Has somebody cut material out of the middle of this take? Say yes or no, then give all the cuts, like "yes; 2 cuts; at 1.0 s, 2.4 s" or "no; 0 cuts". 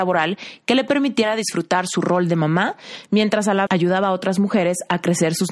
yes; 1 cut; at 3.7 s